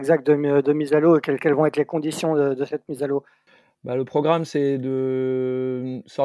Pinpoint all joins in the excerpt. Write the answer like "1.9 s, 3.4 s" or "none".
3.5 s